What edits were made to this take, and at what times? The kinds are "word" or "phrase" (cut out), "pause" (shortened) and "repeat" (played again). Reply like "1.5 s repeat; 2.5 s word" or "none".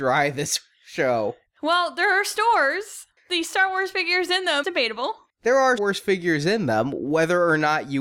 4.6 s word; 5.8 s word